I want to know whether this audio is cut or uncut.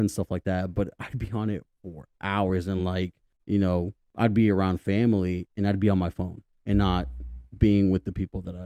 uncut